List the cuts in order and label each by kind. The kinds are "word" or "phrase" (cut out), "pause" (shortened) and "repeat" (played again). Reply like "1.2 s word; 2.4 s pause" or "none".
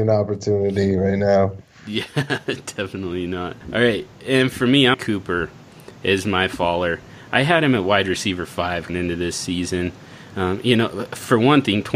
3.6 s pause; 4.9 s phrase; 8.9 s word